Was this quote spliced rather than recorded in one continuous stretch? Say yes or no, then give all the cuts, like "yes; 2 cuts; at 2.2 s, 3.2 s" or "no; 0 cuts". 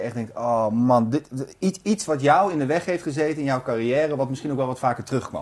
no; 0 cuts